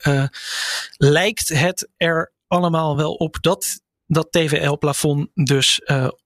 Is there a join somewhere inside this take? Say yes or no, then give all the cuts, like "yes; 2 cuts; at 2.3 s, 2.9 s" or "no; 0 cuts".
no; 0 cuts